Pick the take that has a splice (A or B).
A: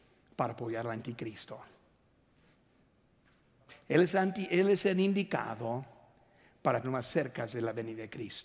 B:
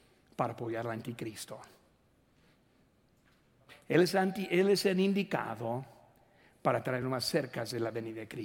A